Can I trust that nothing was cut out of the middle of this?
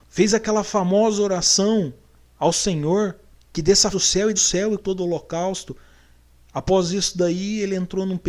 no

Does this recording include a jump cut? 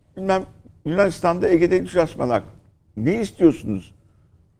no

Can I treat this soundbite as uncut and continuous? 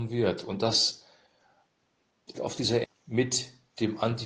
no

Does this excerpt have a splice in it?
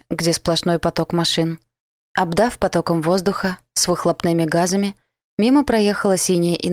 no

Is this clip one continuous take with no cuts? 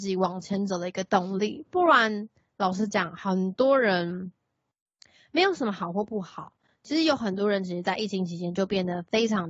yes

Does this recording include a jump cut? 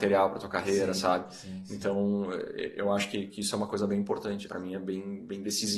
yes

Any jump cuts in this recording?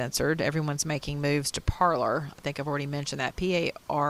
no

